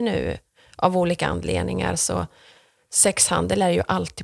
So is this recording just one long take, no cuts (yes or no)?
yes